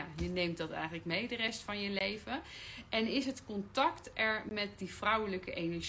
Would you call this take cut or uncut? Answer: uncut